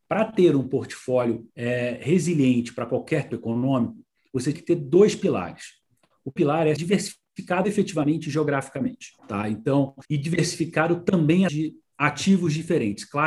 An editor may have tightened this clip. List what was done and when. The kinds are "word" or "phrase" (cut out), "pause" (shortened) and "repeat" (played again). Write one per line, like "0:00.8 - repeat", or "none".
0:01.5 - pause
0:03.3 - word
0:04.5 - word
0:06.4 - word
0:06.8 - word
0:09.2 - pause
0:10.0 - pause
0:11.5 - word